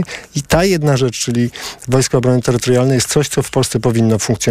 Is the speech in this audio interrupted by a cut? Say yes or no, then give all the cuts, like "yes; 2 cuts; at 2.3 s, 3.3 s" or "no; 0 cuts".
no; 0 cuts